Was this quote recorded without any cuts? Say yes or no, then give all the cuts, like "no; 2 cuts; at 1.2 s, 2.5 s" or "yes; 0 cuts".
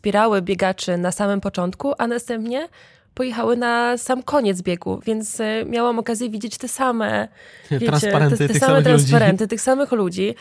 yes; 0 cuts